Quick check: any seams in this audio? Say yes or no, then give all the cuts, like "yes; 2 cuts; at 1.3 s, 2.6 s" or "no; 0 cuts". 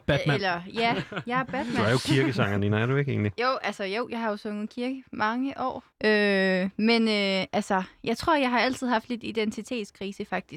yes; 1 cut; at 5.9 s